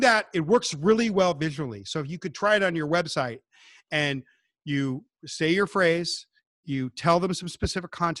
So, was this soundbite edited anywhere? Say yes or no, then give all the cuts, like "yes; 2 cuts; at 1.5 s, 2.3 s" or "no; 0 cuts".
no; 0 cuts